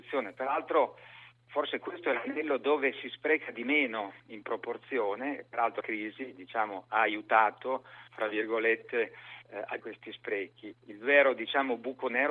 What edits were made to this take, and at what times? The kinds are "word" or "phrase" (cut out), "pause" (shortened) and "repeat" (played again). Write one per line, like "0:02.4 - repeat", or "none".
0:04.2 - pause
0:05.8 - word
0:08.1 - pause
0:09.8 - word
0:10.7 - word